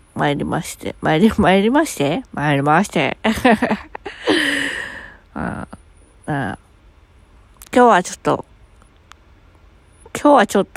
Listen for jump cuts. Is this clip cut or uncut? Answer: uncut